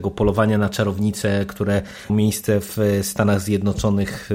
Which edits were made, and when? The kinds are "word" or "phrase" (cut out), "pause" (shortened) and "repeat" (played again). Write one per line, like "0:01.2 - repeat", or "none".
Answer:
0:02.1 - word